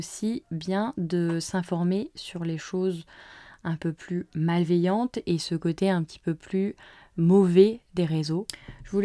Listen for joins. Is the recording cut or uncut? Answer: uncut